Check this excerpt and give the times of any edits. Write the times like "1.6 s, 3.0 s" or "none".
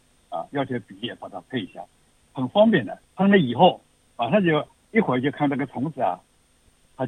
3.0 s, 4.1 s